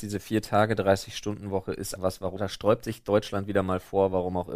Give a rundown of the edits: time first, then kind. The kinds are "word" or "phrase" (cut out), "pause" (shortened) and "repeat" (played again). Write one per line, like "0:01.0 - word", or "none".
0:02.0 - word
0:02.4 - phrase